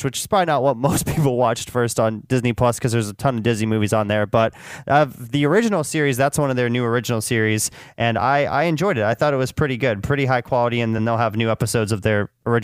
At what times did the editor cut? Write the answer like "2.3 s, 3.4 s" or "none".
none